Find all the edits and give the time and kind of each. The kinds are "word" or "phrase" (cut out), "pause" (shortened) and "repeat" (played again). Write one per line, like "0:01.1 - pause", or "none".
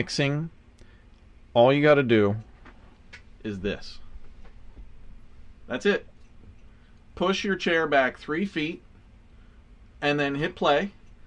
none

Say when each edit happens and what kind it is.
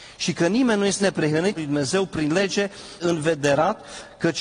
0:01.0 - word
0:01.6 - word
0:03.0 - word

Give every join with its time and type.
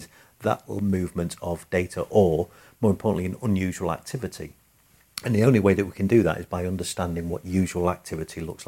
none

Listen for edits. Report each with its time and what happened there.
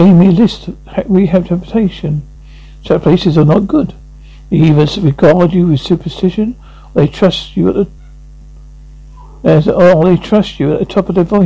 none

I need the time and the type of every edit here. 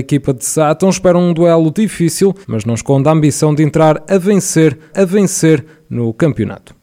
0:02.4 - pause
0:04.9 - repeat

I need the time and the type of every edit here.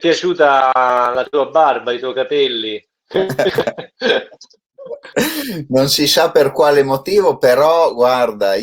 0:02.9 - pause

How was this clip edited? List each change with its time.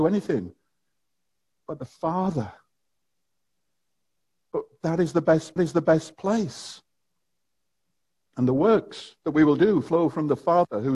0:05.6 - repeat
0:09.2 - pause

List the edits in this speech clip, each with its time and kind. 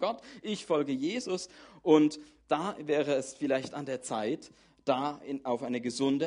none

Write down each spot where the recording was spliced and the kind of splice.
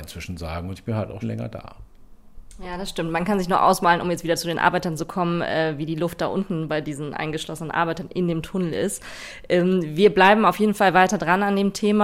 0:01.2 - phrase

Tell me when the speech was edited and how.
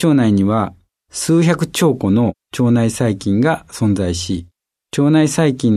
none

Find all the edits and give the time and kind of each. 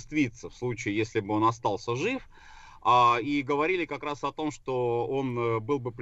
none

